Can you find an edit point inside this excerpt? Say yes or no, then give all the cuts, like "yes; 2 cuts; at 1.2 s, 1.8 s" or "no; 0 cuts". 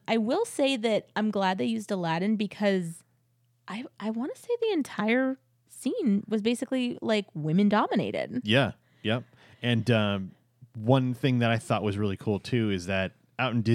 no; 0 cuts